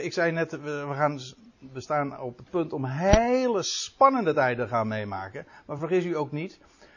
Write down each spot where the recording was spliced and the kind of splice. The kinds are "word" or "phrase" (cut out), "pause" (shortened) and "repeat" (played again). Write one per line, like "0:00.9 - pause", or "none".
none